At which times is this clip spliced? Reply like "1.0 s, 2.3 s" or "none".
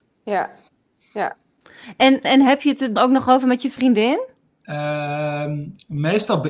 2.2 s, 3.0 s

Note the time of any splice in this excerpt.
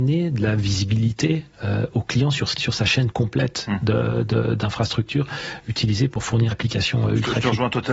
2.6 s, 6.5 s

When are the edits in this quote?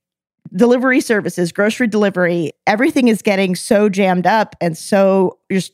none

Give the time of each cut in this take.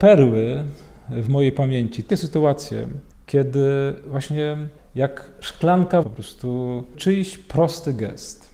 2.1 s, 3.1 s, 4.8 s, 6.0 s, 6.9 s

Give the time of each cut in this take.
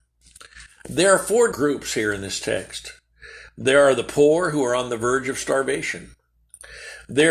1.5 s

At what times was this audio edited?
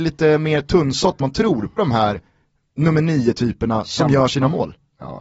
1.2 s, 1.8 s

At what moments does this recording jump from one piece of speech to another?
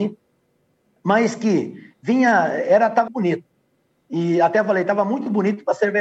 3.1 s

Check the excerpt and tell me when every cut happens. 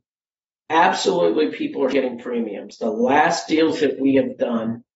1.9 s

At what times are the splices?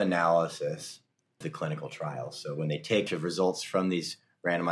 1.4 s, 3.1 s

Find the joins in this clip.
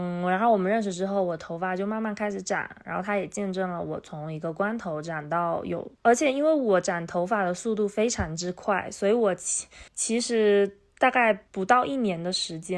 6.0 s, 9.9 s, 11.5 s

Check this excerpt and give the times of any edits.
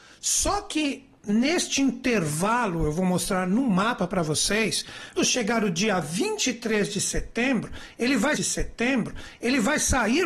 5.2 s, 8.4 s

